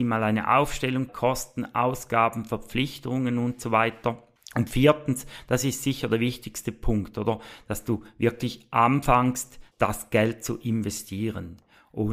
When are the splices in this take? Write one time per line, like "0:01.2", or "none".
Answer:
0:01.1
0:09.7